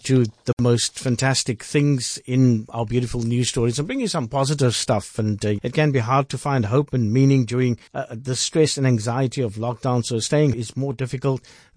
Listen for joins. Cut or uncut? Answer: cut